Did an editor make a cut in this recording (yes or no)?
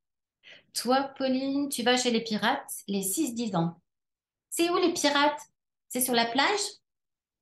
no